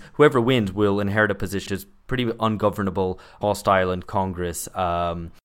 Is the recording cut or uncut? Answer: cut